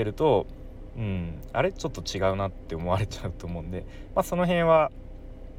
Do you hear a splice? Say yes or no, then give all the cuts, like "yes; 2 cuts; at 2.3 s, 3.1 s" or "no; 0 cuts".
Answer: no; 0 cuts